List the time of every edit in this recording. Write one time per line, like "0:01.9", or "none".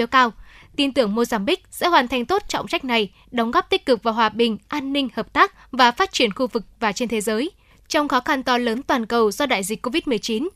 none